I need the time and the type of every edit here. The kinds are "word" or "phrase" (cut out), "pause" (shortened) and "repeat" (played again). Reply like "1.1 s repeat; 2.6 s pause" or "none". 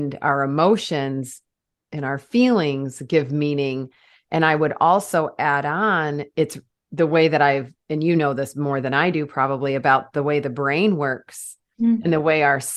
none